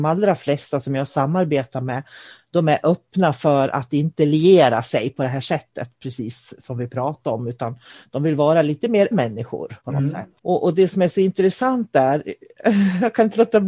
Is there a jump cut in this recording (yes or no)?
yes